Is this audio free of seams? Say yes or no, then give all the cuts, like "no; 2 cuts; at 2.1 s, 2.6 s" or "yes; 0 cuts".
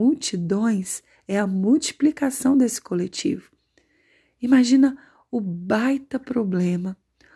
yes; 0 cuts